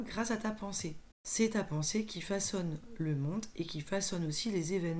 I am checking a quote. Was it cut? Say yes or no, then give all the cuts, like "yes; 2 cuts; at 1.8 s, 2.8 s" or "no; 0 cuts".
yes; 1 cut; at 1.1 s